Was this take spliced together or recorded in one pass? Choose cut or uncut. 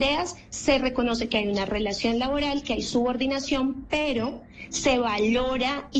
uncut